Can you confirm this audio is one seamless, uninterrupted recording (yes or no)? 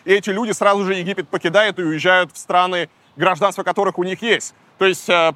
yes